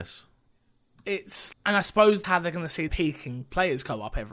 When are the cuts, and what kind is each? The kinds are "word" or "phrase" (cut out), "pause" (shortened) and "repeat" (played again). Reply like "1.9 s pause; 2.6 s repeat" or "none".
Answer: 1.5 s word; 2.2 s word; 2.9 s word